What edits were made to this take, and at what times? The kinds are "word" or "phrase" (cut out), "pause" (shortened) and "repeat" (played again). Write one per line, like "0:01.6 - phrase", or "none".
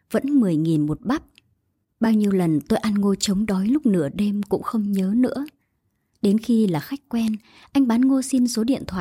none

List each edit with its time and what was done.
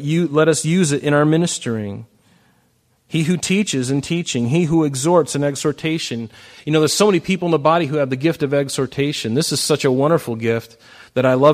none

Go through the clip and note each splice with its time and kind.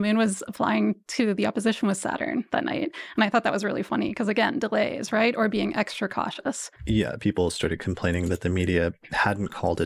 0:06.8 - pause

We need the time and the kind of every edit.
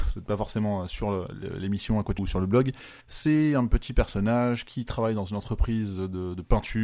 0:02.2 - word
0:03.0 - pause

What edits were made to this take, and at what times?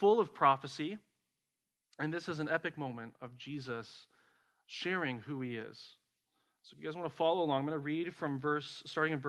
none

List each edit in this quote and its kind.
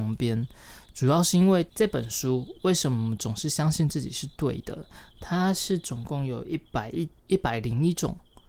0:01.7 - pause
0:07.2 - pause

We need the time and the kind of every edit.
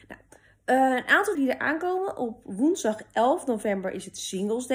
0:01.3 - word

